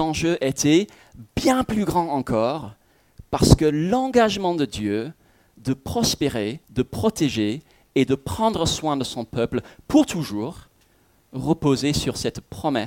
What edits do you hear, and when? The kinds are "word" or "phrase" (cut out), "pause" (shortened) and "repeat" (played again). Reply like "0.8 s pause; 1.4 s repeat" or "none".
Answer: 6.6 s pause